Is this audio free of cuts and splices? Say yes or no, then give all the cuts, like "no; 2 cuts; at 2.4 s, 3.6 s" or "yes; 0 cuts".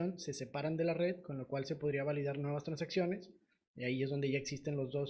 yes; 0 cuts